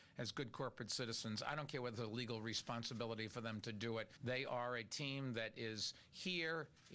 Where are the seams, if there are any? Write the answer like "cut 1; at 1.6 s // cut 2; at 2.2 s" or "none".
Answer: cut 1; at 4.2 s

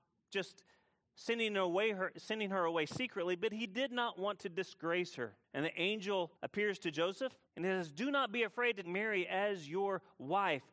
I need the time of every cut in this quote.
cut 1; at 5.4 s // cut 2; at 6.4 s // cut 3; at 7.5 s // cut 4; at 8.8 s

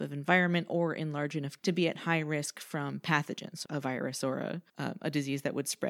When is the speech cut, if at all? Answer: cut 1; at 1.6 s // cut 2; at 3.6 s // cut 3; at 4.7 s

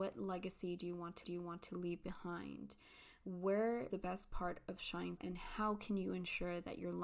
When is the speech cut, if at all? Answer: cut 1; at 1.2 s // cut 2; at 3.9 s // cut 3; at 4.8 s // cut 4; at 5.2 s

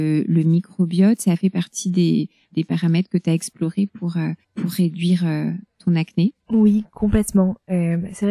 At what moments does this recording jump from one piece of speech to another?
cut 1; at 4.4 s // cut 2; at 6.4 s

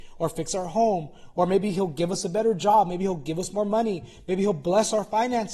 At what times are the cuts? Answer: none

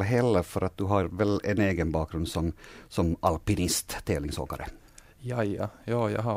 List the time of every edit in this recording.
none

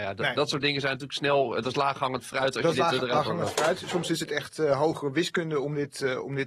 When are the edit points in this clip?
none

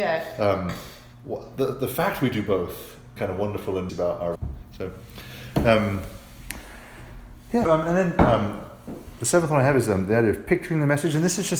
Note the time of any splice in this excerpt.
cut 1; at 1.1 s // cut 2; at 3.2 s // cut 3; at 3.9 s // cut 4; at 4.4 s // cut 5; at 7.7 s

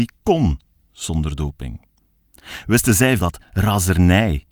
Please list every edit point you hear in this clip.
cut 1; at 3.2 s

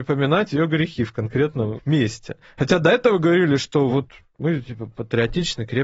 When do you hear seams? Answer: none

